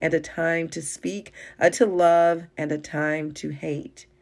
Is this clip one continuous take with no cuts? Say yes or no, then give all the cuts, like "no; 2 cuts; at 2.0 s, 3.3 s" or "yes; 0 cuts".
no; 2 cuts; at 1.7 s, 2.5 s